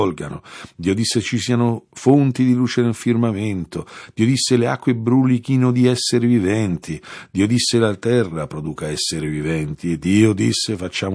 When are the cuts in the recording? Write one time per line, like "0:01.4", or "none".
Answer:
none